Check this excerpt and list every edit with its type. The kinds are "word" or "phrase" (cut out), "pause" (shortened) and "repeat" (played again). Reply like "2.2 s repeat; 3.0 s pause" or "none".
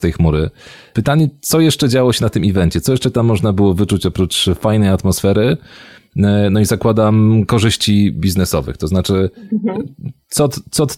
none